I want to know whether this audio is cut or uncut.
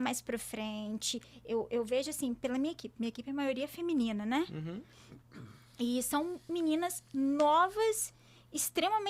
uncut